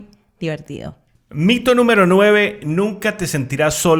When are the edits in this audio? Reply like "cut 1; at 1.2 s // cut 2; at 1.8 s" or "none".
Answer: none